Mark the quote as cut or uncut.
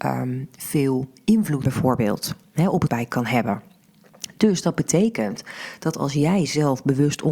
cut